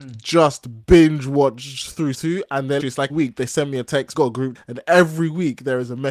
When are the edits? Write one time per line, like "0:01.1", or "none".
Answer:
0:02.1
0:02.8
0:03.1
0:04.1
0:04.5